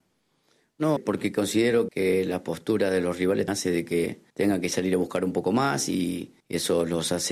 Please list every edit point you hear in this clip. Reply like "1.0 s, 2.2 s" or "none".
1.0 s, 1.9 s, 3.5 s, 4.3 s, 6.4 s